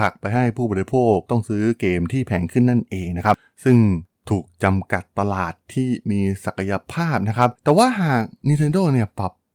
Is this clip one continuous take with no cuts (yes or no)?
no